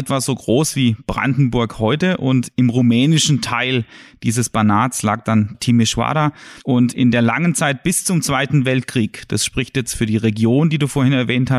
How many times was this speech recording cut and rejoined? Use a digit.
2